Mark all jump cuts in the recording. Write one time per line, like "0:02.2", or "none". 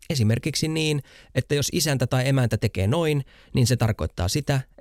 none